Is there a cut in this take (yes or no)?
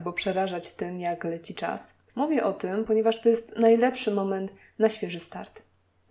no